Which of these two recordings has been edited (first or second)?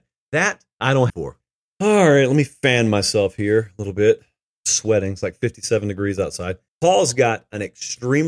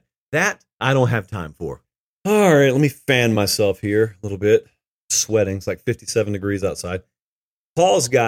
first